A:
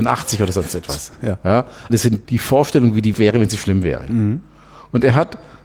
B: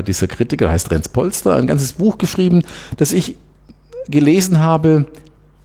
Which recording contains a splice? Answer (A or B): A